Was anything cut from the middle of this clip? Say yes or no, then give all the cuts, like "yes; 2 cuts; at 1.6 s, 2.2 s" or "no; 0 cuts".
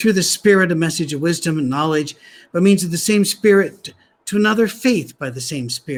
no; 0 cuts